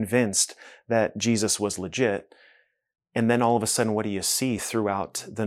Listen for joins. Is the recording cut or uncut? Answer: uncut